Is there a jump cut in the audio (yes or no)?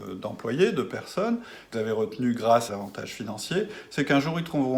yes